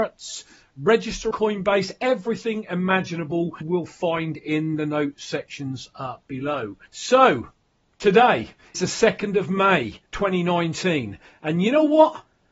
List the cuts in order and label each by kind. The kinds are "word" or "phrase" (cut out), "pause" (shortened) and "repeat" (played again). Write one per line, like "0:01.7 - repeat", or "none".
0:01.3 - word
0:03.6 - word
0:06.9 - pause
0:08.7 - word
0:10.1 - pause